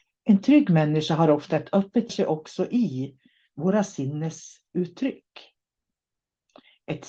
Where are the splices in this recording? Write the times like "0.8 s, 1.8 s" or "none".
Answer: 2.1 s